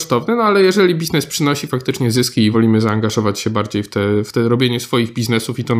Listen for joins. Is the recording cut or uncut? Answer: cut